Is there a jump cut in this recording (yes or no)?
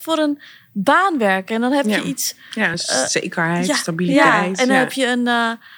no